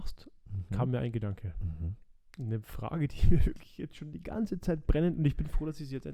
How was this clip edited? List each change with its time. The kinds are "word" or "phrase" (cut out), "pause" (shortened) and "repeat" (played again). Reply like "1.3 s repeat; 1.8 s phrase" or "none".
none